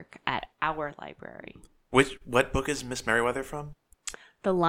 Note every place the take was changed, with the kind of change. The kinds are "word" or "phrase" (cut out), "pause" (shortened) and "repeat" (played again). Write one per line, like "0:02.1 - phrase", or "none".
none